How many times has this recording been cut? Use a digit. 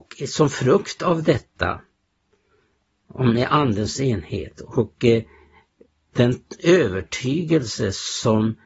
0